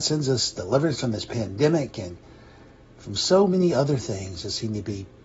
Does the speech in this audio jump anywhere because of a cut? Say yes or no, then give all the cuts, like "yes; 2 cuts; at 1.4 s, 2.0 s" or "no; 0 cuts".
no; 0 cuts